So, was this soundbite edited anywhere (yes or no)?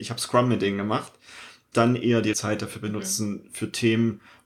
yes